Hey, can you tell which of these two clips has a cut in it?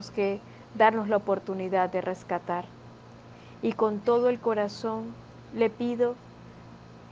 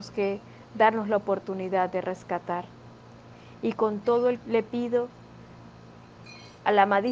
second; 1 cut; at 4.4 s

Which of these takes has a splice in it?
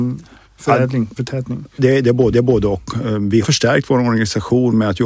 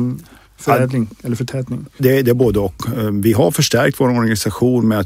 first; 3 cuts; at 1.2 s, 2.3 s, 3.4 s

